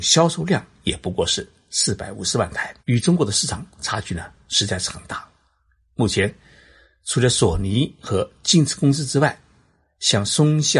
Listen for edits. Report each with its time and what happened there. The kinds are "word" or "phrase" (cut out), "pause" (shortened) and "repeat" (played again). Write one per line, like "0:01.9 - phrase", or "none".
0:02.8 - pause